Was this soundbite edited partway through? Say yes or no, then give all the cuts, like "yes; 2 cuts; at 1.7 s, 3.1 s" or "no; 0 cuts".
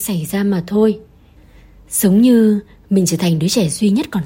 no; 0 cuts